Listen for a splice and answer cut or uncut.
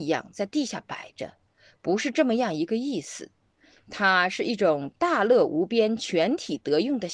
uncut